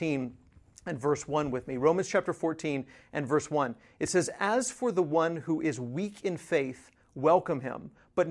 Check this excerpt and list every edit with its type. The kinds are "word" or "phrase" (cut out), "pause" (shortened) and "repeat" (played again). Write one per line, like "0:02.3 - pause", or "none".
none